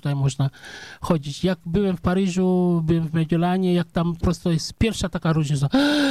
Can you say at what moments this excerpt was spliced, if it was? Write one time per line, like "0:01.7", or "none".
0:04.2